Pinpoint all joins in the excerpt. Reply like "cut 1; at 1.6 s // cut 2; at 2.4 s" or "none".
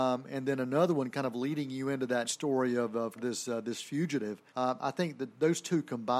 cut 1; at 2.2 s // cut 2; at 3.2 s // cut 3; at 4.5 s